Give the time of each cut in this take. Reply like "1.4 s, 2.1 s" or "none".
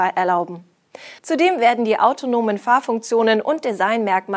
1.2 s

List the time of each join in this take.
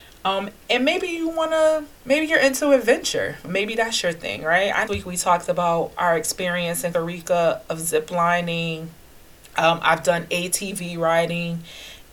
2.0 s, 4.9 s, 6.9 s, 9.1 s

